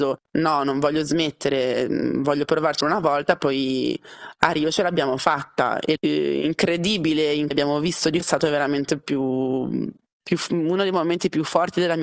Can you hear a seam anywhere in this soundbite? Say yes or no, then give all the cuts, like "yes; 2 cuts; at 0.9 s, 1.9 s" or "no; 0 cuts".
yes; 5 cuts; at 2.8 s, 6.0 s, 7.5 s, 8.2 s, 9.0 s